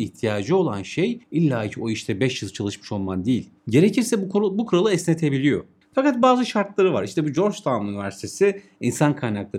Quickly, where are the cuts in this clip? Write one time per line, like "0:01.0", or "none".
0:01.2
0:03.6
0:05.8